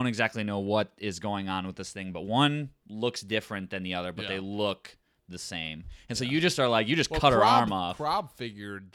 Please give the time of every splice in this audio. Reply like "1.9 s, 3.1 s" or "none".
none